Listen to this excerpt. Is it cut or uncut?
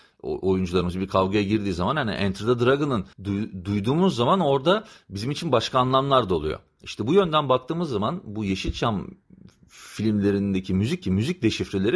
cut